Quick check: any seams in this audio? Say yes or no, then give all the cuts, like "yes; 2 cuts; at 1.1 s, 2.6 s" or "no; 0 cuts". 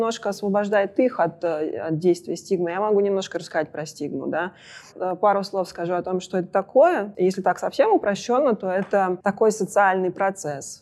yes; 1 cut; at 9.2 s